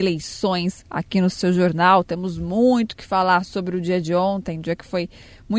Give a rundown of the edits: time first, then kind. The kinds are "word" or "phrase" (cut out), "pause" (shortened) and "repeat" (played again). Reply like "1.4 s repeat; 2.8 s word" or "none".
none